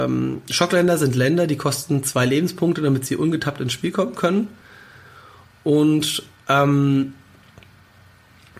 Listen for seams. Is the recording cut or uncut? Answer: uncut